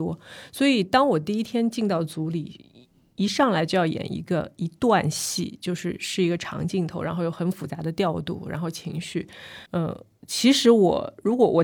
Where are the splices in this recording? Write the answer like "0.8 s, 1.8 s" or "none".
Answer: 9.7 s